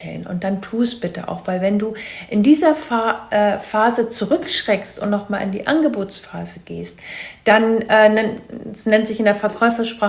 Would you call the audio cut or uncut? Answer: uncut